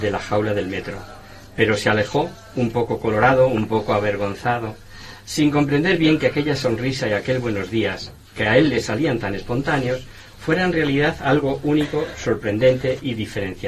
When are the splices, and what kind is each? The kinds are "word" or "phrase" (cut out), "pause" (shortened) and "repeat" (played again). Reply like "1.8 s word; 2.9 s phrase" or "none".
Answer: none